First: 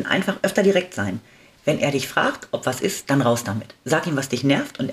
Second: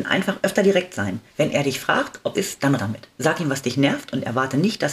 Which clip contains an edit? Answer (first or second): second